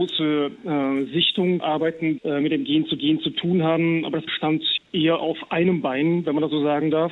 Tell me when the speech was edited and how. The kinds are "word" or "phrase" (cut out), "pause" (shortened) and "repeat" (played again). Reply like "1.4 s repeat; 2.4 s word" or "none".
1.6 s word; 2.2 s word; 3.0 s repeat; 4.3 s word; 4.8 s word

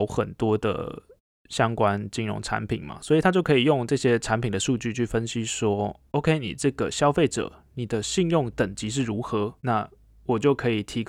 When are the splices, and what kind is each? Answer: 9.6 s pause

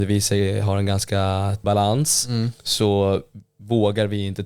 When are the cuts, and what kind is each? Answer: 1.6 s word

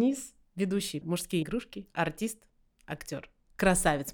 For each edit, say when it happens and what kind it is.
1.0 s word; 1.4 s word

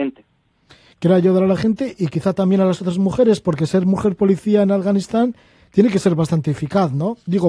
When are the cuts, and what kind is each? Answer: none

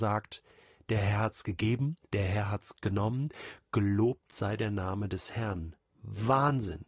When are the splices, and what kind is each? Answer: 2.0 s pause

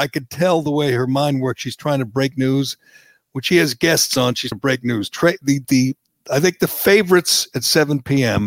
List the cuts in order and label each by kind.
4.5 s word; 5.6 s word

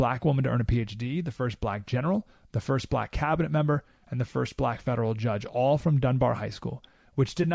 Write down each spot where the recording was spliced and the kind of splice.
none

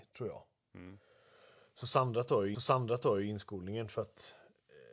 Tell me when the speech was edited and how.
2.5 s repeat

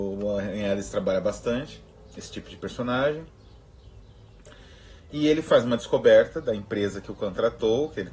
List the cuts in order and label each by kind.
none

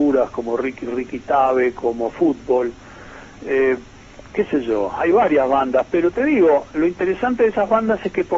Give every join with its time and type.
none

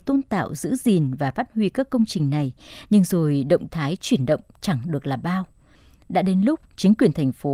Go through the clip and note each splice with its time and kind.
none

